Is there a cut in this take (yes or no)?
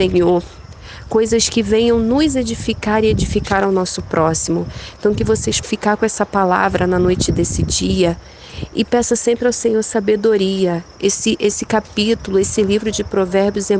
yes